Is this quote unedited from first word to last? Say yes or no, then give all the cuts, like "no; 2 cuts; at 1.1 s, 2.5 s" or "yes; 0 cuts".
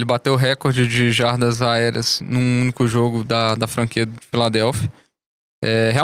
yes; 0 cuts